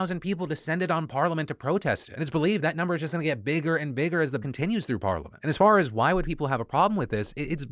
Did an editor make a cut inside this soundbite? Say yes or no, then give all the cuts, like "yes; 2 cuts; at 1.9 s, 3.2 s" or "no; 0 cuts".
yes; 1 cut; at 4.4 s